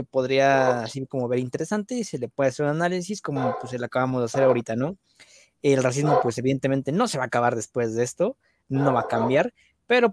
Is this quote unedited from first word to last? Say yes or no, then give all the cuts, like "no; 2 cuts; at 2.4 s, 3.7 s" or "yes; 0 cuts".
yes; 0 cuts